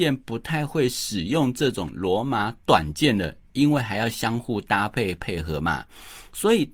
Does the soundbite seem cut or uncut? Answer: uncut